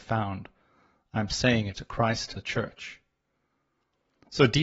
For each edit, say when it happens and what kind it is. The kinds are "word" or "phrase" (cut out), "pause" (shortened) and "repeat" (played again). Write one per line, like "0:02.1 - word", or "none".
0:01.7 - word
0:02.4 - word